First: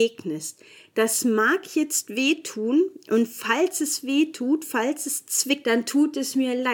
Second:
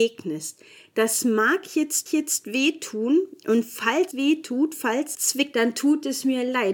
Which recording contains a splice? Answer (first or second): second